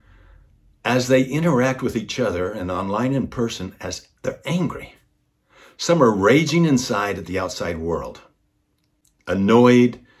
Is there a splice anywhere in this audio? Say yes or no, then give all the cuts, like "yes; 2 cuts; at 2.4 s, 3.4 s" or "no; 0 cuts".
yes; 1 cut; at 4.2 s